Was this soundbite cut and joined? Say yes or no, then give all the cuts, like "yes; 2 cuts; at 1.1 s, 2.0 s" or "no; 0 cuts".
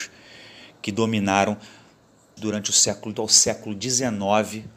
yes; 2 cuts; at 2.4 s, 3.1 s